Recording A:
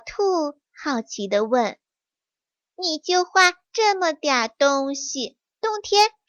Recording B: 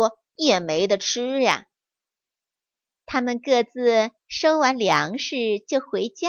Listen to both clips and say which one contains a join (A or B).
B